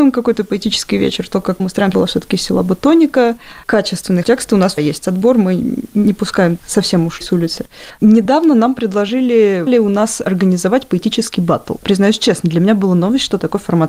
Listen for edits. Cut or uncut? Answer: cut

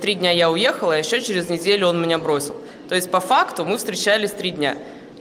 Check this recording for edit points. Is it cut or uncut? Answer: uncut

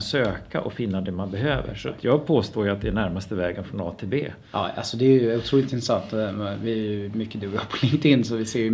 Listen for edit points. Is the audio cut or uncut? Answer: uncut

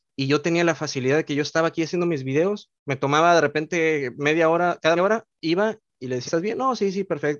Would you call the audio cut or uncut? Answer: cut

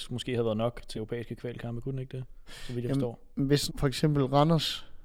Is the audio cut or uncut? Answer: cut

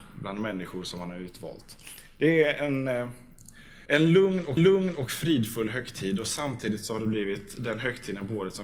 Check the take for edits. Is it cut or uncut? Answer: cut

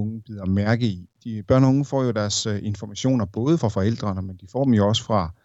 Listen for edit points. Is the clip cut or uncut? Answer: uncut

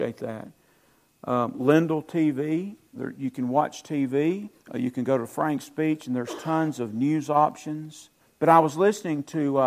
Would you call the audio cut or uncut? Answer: cut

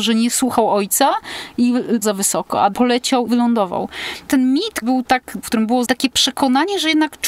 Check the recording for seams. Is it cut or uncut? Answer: cut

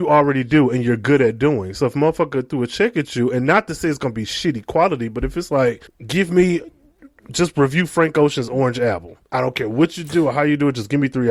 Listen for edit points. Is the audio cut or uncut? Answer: cut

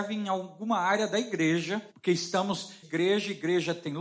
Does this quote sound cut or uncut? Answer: cut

